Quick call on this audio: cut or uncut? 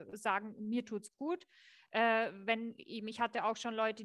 uncut